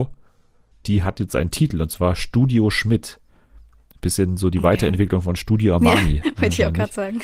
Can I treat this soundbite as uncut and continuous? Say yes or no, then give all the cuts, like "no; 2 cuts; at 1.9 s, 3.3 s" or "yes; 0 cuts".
yes; 0 cuts